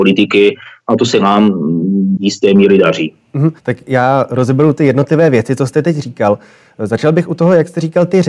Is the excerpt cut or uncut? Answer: cut